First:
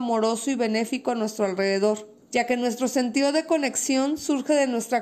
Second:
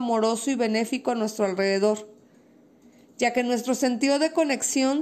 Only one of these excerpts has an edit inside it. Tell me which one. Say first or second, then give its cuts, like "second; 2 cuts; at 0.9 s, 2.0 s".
first; 1 cut; at 2.2 s